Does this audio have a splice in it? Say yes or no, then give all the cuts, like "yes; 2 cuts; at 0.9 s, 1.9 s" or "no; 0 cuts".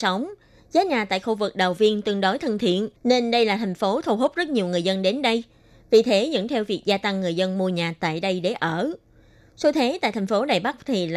yes; 1 cut; at 3.0 s